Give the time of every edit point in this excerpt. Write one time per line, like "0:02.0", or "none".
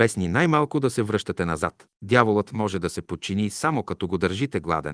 0:01.9